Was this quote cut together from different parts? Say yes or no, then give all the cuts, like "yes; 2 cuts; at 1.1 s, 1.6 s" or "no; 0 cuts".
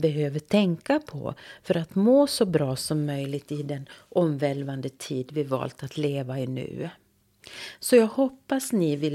no; 0 cuts